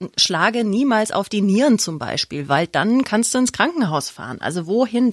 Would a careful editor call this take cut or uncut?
uncut